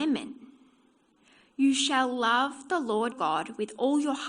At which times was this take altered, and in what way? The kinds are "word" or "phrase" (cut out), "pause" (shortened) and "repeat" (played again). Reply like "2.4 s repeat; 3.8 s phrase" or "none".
3.1 s word